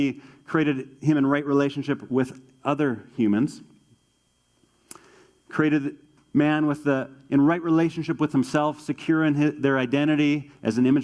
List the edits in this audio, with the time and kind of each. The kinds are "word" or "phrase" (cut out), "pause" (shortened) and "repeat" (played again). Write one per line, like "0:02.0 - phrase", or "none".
none